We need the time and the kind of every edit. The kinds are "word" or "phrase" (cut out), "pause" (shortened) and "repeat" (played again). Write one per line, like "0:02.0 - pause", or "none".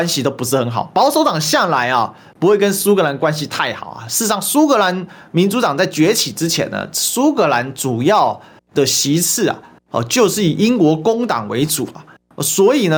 none